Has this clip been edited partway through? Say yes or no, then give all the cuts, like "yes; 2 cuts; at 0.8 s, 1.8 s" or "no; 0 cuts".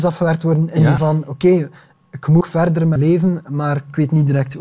yes; 3 cuts; at 1.0 s, 2.4 s, 3.0 s